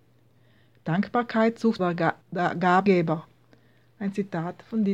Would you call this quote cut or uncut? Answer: cut